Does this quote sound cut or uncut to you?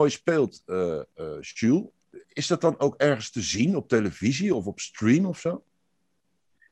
uncut